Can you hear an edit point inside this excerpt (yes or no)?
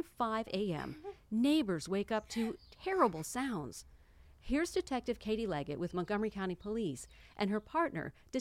no